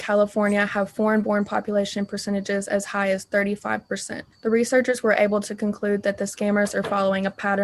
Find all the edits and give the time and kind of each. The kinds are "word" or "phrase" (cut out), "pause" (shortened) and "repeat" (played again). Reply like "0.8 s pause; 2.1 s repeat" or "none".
4.3 s pause